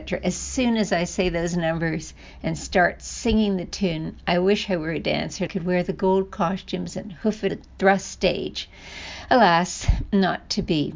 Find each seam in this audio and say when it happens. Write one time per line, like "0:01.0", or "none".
0:05.5
0:07.5